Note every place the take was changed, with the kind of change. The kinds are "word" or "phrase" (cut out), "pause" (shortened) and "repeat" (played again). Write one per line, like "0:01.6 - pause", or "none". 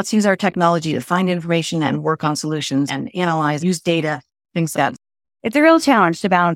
0:02.9 - word
0:03.6 - word
0:04.7 - word

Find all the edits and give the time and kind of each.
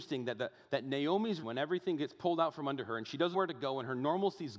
0:01.4 - word
0:03.3 - word

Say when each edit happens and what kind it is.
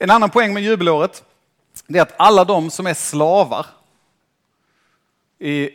none

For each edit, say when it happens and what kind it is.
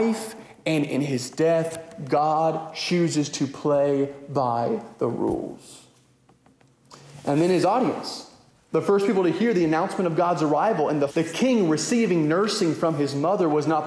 0:11.1 - phrase

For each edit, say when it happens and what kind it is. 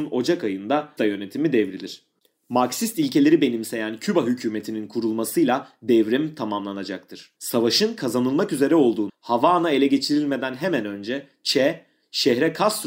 0:01.0 - word
0:07.4 - pause
0:09.1 - word

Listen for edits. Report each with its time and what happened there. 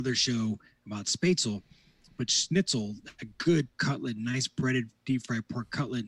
0:03.7 - word

